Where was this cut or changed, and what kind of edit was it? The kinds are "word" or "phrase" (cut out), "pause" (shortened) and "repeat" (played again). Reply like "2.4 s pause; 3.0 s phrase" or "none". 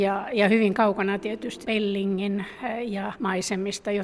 1.6 s word; 3.1 s word

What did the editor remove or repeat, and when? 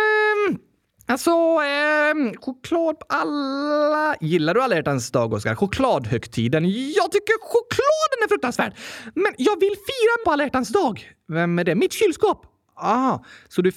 10.2 s phrase

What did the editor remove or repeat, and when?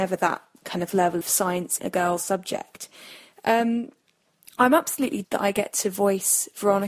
1.2 s word; 1.8 s word; 5.2 s word

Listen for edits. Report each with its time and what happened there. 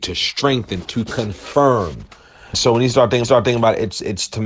2.5 s word; 3.2 s repeat

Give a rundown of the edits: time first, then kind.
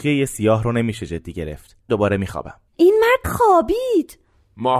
1.9 s word; 2.7 s pause; 3.2 s word

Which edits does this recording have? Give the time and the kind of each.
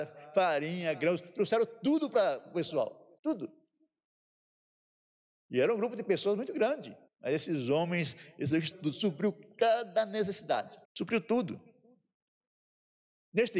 3.2 s pause; 7.1 s pause; 8.7 s word; 10.8 s pause

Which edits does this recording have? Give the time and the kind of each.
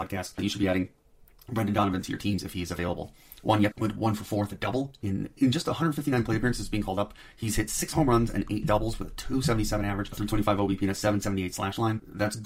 none

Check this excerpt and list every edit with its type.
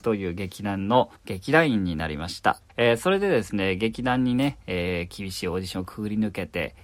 1.2 s pause; 2.7 s pause

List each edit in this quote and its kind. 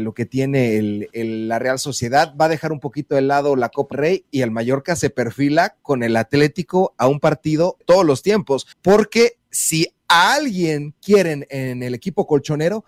3.9 s word; 7.8 s word; 8.7 s pause

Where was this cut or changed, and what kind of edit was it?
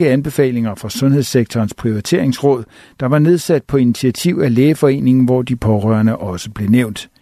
none

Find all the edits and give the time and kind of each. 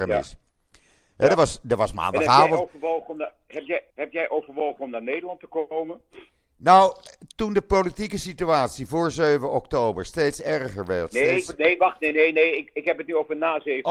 3.9 s pause

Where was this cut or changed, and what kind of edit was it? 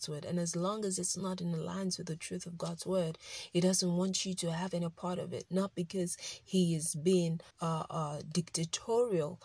7.5 s pause

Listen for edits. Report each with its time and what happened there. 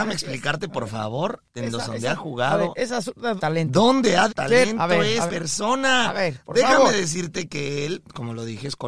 1.9 s word; 3.4 s phrase; 4.3 s word; 5.3 s word

